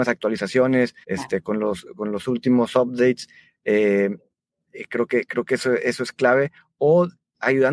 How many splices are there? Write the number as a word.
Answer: one